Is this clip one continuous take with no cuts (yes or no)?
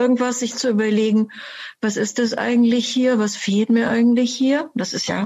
yes